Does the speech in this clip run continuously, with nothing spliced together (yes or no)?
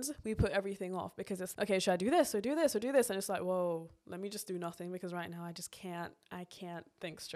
no